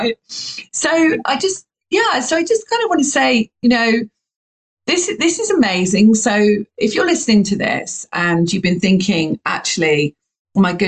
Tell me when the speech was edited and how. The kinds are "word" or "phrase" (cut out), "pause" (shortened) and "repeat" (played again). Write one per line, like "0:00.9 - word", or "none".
none